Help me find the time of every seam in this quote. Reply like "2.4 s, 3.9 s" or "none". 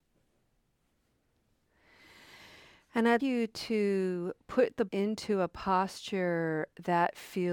3.2 s, 4.9 s